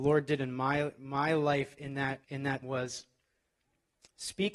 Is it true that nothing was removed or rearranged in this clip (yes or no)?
no